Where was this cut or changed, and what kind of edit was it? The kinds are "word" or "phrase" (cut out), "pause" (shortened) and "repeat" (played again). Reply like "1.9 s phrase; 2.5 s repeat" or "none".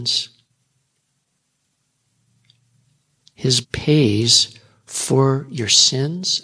3.6 s word